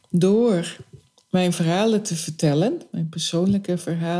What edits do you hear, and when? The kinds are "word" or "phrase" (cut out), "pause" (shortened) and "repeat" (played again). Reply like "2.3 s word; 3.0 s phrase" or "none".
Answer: none